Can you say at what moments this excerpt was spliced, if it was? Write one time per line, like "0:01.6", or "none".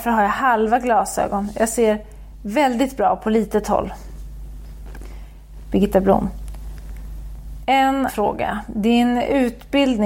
0:08.1